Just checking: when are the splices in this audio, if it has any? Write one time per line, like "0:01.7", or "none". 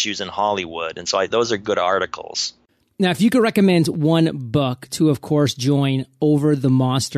0:01.3

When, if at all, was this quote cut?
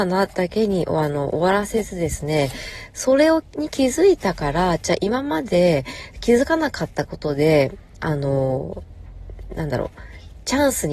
none

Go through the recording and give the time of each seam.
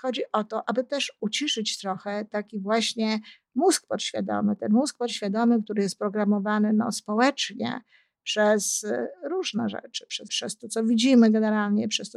0:10.3

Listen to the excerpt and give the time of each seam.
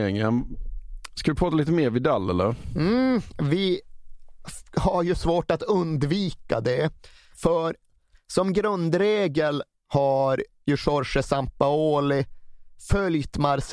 none

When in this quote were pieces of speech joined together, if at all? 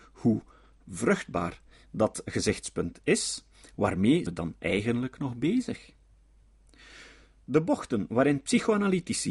0:04.3

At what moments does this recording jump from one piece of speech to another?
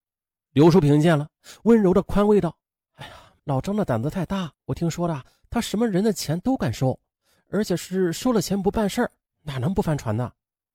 0:03.4
0:04.6

